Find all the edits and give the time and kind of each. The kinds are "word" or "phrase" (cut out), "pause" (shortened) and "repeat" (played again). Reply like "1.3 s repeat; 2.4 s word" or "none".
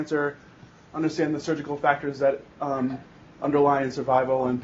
none